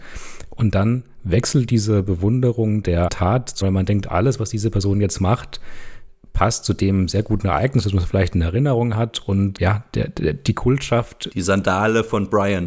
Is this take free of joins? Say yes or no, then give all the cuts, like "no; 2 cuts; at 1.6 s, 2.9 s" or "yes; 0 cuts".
no; 3 cuts; at 3.1 s, 3.6 s, 9.6 s